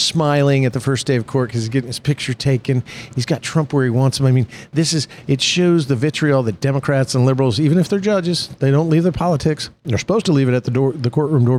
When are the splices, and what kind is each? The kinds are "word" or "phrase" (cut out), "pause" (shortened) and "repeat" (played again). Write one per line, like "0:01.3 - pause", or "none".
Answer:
none